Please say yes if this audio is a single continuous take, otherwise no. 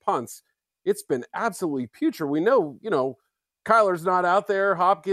yes